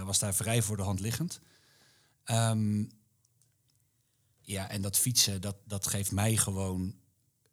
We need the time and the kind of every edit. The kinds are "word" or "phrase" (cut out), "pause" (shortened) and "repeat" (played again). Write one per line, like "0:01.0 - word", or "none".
none